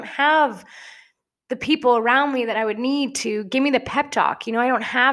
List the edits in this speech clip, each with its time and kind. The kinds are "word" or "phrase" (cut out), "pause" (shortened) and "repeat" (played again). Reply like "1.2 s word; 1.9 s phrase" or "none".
none